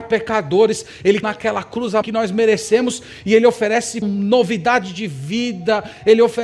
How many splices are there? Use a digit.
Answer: 3